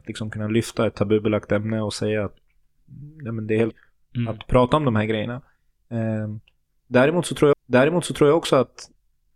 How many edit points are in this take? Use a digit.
2